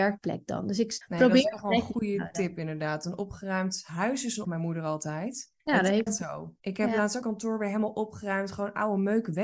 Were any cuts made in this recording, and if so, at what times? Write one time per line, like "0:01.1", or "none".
0:01.0
0:04.4
0:05.6
0:06.1
0:06.6
0:07.2